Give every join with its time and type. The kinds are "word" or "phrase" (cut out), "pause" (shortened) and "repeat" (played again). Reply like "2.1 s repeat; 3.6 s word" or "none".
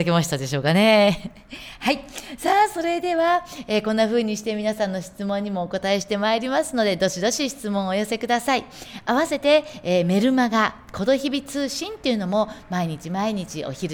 none